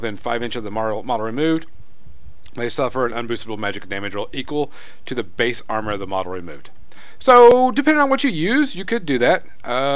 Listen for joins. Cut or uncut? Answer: uncut